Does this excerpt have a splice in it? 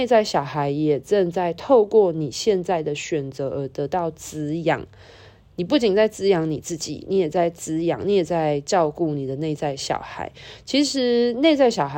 no; 0 cuts

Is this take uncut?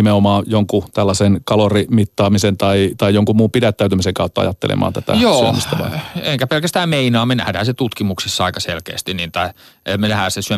yes; 0 cuts

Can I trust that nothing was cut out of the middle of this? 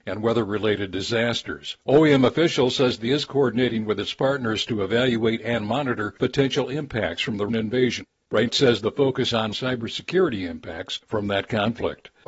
no; 4 cuts; at 3.1 s, 7.5 s, 8.5 s, 9.3 s

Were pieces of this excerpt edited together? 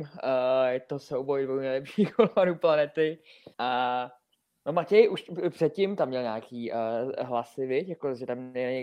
yes; 2 cuts; at 3.5 s, 4.3 s

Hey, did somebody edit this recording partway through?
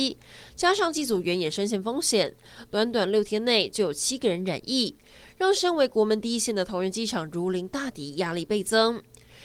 no; 0 cuts

